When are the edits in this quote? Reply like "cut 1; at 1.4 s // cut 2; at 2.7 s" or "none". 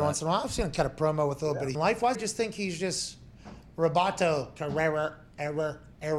cut 1; at 1.7 s // cut 2; at 2.1 s